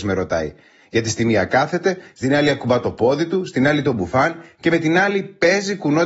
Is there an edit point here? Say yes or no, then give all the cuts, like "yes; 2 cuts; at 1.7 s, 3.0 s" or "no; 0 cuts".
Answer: no; 0 cuts